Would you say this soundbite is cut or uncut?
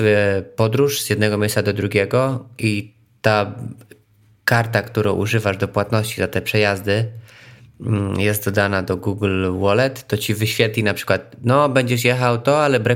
uncut